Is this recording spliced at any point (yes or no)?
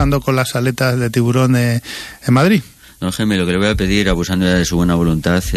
no